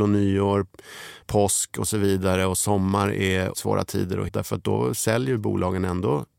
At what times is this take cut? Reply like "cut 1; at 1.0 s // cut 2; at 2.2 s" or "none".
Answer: cut 1; at 1.2 s // cut 2; at 3.5 s // cut 3; at 4.3 s